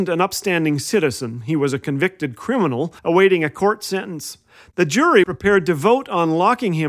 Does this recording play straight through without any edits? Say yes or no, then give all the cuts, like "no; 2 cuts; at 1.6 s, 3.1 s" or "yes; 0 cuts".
no; 2 cuts; at 3.0 s, 5.2 s